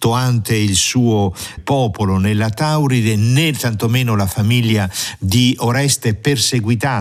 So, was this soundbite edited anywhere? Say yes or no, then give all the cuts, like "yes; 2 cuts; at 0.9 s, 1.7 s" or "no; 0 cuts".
yes; 1 cut; at 1.6 s